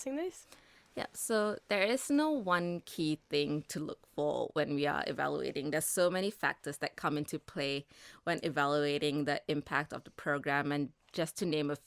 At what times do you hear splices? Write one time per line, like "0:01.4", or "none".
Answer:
none